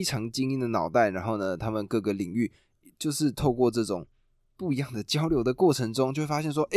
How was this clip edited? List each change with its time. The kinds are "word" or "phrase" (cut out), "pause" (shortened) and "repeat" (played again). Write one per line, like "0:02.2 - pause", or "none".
none